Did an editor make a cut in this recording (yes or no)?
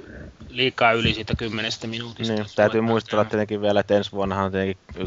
no